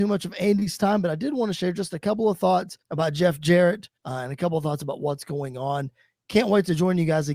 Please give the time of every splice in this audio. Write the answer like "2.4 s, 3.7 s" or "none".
2.8 s, 4.0 s